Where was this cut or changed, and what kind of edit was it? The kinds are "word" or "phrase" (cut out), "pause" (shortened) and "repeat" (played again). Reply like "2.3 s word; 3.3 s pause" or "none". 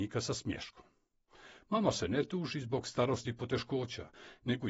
none